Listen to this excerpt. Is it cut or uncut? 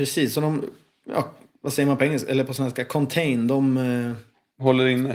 uncut